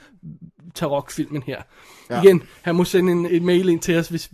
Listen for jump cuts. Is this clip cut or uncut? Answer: cut